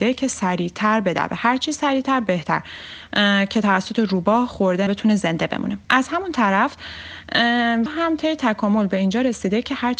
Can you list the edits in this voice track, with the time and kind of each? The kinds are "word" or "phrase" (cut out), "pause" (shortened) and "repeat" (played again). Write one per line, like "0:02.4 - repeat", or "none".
0:04.9 - phrase
0:05.8 - pause
0:07.9 - word

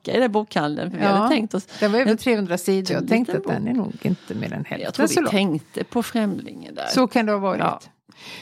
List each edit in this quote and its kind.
0:02.9 - word

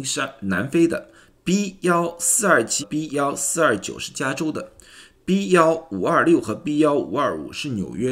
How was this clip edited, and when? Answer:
0:02.8 - word

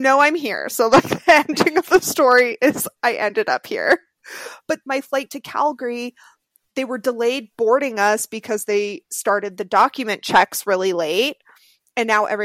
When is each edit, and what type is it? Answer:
0:04.8 - word

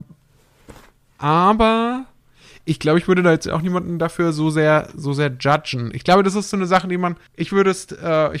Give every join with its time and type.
0:07.3 - pause

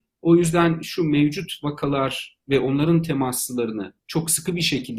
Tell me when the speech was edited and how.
0:04.0 - pause

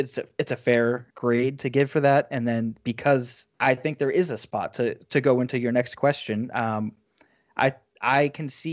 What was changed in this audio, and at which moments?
0:01.1 - pause
0:03.5 - pause

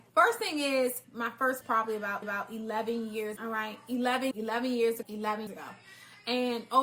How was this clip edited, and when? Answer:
0:01.0 - phrase
0:01.6 - word
0:02.2 - repeat
0:03.4 - word
0:04.3 - phrase
0:05.0 - word
0:05.5 - word

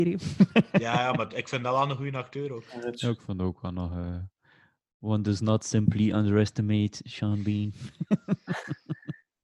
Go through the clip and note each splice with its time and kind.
none

